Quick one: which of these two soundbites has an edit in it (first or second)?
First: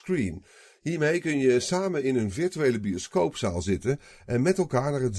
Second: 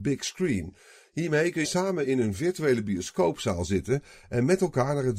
second